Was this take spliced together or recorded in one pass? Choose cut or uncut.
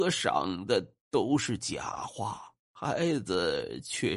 cut